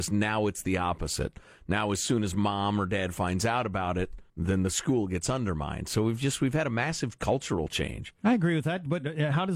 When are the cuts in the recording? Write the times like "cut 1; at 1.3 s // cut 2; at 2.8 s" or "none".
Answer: cut 1; at 4.3 s